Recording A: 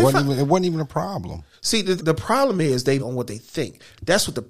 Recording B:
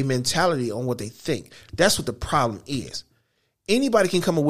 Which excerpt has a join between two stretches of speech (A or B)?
A